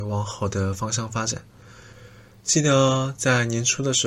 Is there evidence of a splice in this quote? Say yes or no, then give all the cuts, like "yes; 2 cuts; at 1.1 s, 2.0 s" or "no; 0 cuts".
no; 0 cuts